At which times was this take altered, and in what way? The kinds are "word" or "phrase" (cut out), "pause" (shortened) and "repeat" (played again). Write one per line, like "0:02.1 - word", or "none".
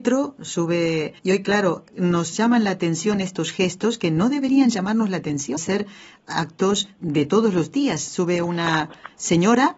0:01.2 - pause
0:05.6 - word
0:07.0 - word